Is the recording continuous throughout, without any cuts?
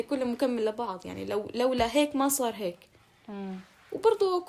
yes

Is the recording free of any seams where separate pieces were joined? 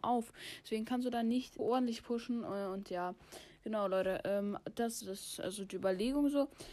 no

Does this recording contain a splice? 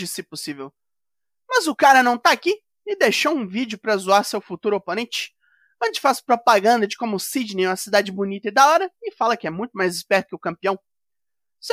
no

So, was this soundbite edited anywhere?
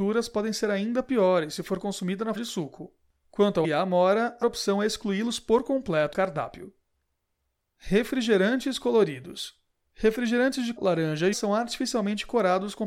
yes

